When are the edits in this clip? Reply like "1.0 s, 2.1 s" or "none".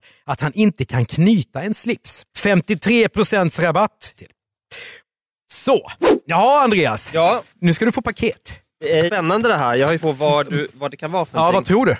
2.3 s, 4.1 s, 7.5 s, 8.7 s, 9.1 s, 10.0 s